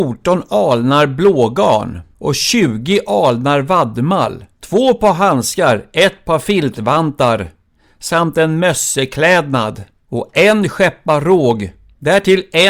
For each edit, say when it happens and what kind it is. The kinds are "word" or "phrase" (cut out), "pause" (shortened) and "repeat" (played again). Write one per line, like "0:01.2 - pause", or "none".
none